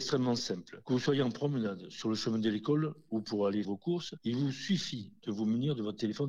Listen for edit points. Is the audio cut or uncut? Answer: cut